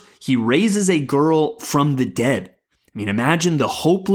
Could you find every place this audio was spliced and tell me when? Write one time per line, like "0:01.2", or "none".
none